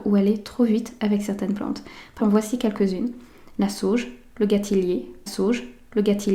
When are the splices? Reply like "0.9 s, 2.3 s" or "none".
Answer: 2.2 s, 5.3 s

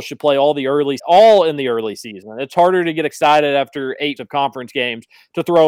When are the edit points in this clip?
1.0 s, 4.2 s

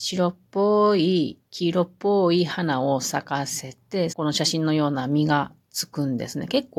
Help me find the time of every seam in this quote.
1.5 s, 4.1 s

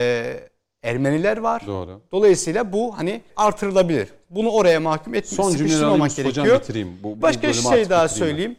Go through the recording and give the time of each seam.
3.3 s, 7.2 s

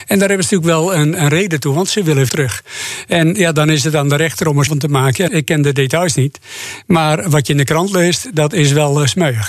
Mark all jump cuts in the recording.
2.3 s, 4.7 s, 5.3 s

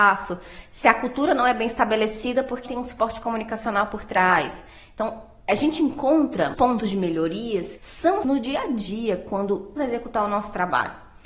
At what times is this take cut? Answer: 2.6 s, 6.5 s, 7.8 s, 8.2 s, 9.8 s

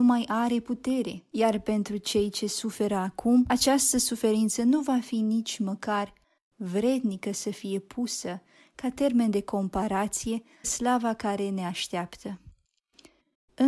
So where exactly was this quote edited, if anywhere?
10.6 s

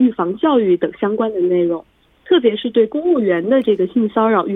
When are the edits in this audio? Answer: none

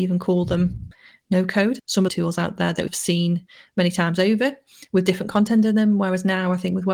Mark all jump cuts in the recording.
2.1 s, 2.9 s

